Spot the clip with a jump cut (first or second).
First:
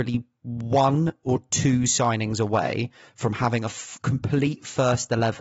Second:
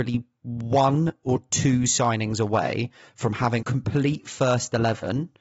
second